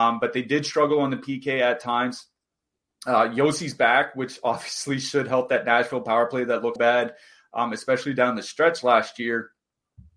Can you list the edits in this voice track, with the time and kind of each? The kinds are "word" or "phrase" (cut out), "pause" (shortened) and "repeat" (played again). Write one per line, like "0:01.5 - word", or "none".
0:06.8 - word